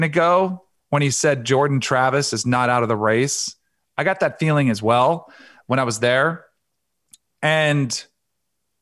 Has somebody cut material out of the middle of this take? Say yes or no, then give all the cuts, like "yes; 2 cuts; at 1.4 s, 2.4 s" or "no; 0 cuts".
no; 0 cuts